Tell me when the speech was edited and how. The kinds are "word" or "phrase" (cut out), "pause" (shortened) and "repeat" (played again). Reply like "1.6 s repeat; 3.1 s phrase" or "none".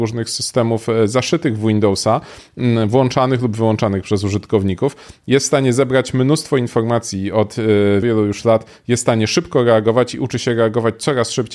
8.0 s word